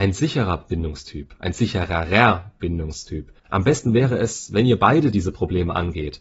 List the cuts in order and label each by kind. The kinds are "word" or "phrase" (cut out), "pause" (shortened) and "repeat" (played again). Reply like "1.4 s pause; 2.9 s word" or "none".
3.4 s pause